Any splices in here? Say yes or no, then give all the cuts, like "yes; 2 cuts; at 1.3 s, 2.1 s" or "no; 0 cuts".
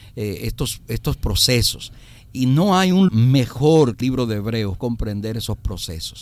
yes; 3 cuts; at 3.1 s, 4.0 s, 4.8 s